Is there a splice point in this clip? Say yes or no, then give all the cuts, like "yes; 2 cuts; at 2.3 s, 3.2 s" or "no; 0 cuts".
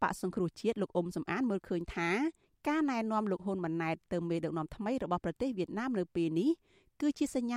no; 0 cuts